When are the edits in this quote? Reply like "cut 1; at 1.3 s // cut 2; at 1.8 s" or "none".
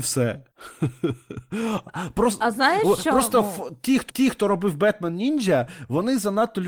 cut 1; at 4.1 s